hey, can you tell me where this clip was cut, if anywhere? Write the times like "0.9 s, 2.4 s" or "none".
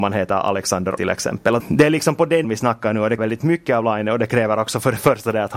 1.0 s, 1.6 s, 2.4 s, 3.2 s